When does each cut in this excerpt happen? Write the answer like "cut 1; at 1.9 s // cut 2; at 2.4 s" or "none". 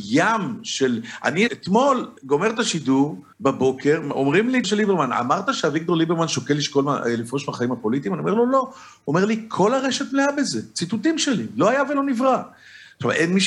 cut 1; at 1.5 s // cut 2; at 2.2 s // cut 3; at 3.3 s // cut 4; at 4.6 s